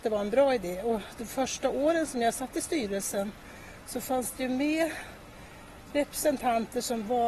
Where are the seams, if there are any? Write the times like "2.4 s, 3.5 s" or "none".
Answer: none